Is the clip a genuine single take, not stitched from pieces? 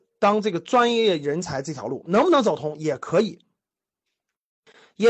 yes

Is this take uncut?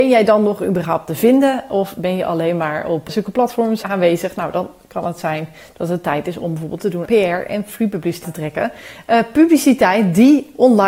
no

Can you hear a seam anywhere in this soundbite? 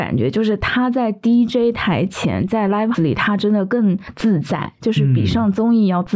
yes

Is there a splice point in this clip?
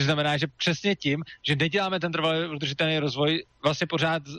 no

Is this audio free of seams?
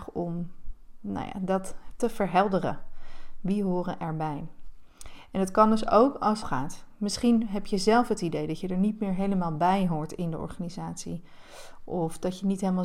no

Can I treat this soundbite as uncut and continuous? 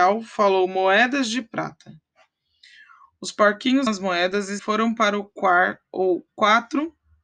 no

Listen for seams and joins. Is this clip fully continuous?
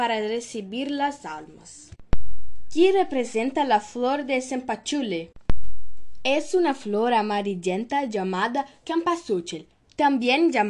yes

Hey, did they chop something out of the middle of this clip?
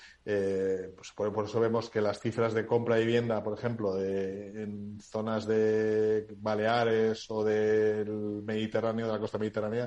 no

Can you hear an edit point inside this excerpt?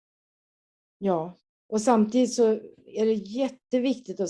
no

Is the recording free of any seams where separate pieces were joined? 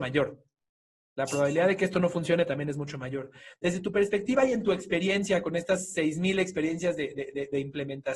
yes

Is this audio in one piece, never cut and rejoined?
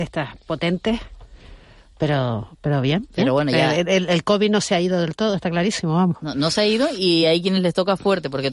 yes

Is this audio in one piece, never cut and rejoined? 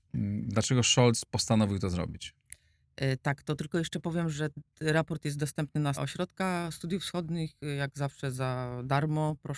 no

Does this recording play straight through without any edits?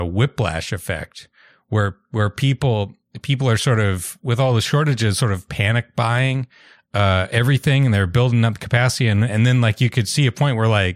yes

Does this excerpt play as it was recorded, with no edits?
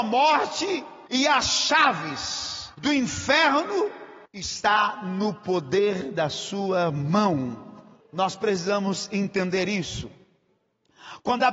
no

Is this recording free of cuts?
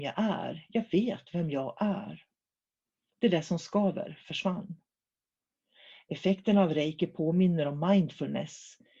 yes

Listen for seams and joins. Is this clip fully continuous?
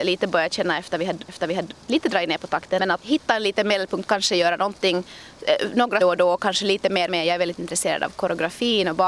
no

